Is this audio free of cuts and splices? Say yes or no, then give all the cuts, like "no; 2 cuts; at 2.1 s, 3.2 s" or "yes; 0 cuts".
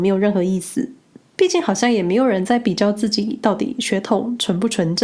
yes; 0 cuts